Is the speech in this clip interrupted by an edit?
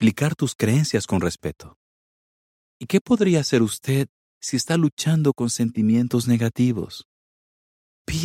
no; 0 cuts

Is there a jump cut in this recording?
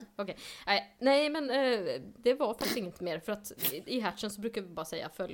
no; 0 cuts

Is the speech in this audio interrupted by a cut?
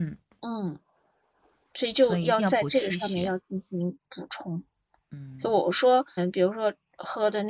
yes; 1 cut; at 6.2 s

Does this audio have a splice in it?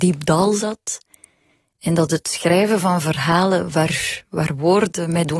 no; 0 cuts

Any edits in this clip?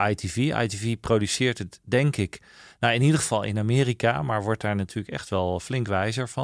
no; 0 cuts

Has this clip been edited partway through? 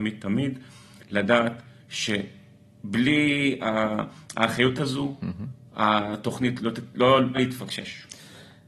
yes; 3 cuts; at 4.8 s, 6.6 s, 7.3 s

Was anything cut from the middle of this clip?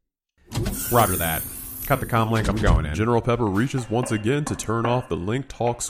no; 0 cuts

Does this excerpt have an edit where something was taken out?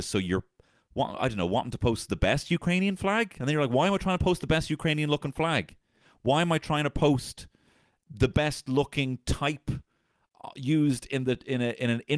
no; 0 cuts

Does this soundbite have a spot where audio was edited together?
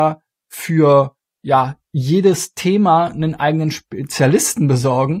no; 0 cuts

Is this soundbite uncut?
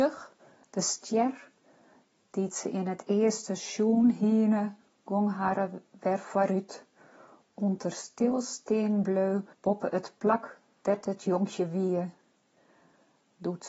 no; 2 cuts; at 5.9 s, 9.5 s

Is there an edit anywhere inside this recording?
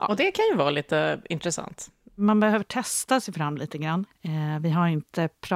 no; 0 cuts

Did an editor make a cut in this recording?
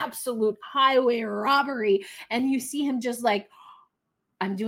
no; 0 cuts

